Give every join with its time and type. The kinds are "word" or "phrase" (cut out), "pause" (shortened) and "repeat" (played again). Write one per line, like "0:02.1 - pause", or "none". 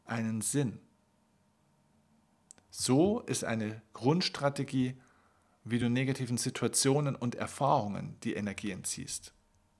none

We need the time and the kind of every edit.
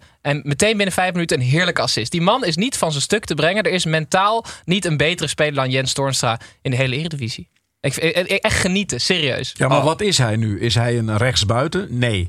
none

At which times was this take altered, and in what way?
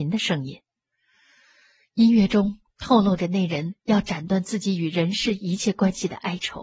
none

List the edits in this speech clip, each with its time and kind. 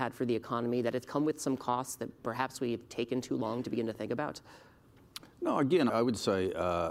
0:05.9 - word

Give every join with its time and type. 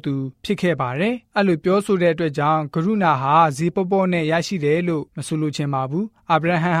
0:01.2 - pause
0:05.1 - pause

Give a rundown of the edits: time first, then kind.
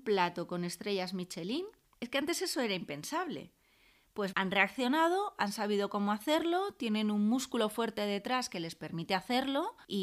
0:04.3 - word

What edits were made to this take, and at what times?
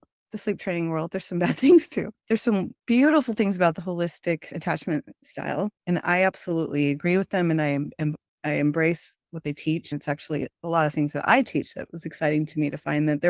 0:02.2 - pause
0:05.8 - pause

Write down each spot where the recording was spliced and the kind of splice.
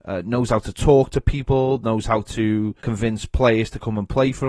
0:02.8 - pause

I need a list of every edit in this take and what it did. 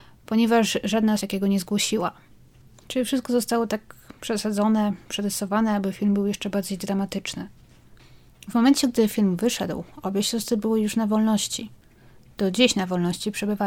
0:01.2 - phrase

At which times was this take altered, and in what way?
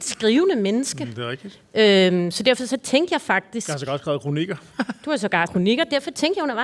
0:05.5 - word

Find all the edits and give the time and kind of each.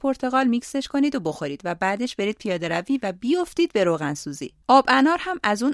none

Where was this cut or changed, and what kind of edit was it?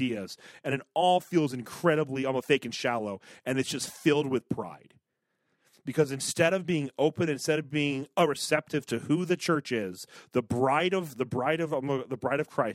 none

